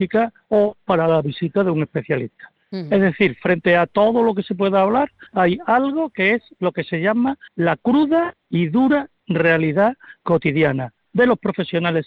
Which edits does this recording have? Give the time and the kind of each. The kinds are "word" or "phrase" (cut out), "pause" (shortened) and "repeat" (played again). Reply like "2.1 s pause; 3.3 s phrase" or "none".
5.3 s pause; 7.5 s pause